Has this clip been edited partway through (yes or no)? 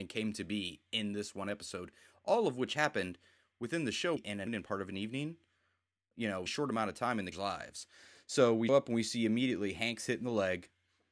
yes